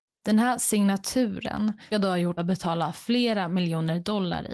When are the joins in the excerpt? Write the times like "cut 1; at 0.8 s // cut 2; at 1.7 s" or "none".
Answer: cut 1; at 1.9 s // cut 2; at 2.4 s